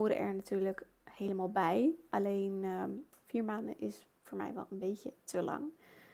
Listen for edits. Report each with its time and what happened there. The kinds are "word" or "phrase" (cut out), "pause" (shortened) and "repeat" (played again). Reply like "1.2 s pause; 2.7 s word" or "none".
none